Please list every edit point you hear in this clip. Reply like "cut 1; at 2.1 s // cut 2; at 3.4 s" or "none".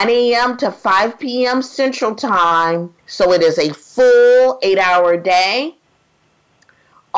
cut 1; at 3.0 s